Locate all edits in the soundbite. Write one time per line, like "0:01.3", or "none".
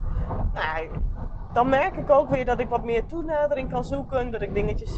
none